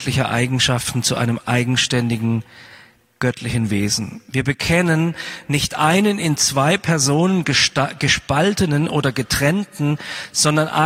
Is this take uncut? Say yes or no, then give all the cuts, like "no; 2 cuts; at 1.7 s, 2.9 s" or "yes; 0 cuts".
yes; 0 cuts